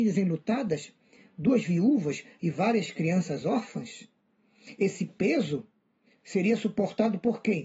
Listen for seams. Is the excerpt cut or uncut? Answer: uncut